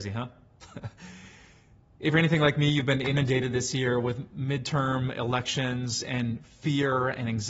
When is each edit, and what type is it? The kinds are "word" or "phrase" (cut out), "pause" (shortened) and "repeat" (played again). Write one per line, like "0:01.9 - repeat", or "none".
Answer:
none